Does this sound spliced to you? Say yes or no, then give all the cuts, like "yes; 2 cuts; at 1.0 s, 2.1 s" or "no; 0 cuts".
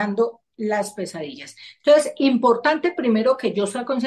no; 0 cuts